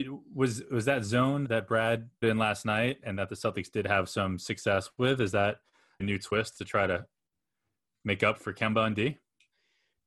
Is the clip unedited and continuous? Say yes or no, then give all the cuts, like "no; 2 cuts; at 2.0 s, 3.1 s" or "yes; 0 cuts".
no; 5 cuts; at 1.4 s, 2.2 s, 3.0 s, 6.0 s, 8.4 s